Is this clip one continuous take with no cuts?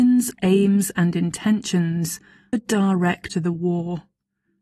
no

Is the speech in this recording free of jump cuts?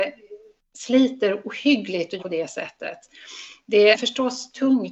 no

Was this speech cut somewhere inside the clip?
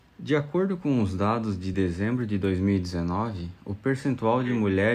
no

